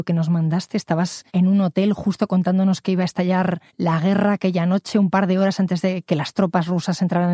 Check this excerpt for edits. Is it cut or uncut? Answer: cut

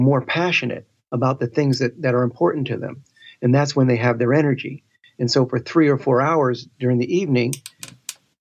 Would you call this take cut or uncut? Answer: uncut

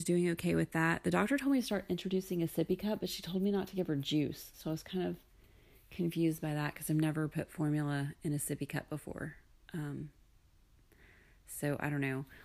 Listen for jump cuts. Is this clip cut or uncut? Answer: uncut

